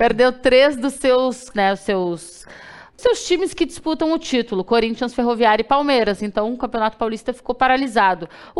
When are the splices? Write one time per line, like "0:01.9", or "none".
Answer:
0:01.5
0:03.0